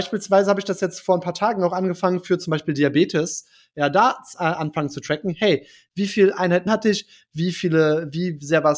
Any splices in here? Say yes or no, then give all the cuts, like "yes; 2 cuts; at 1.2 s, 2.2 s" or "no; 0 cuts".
yes; 1 cut; at 6.7 s